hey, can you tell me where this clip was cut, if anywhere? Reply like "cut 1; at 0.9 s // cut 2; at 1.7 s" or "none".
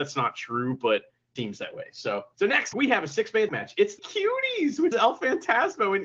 cut 1; at 1.4 s // cut 2; at 2.3 s // cut 3; at 2.7 s // cut 4; at 3.5 s // cut 5; at 4.0 s // cut 6; at 4.9 s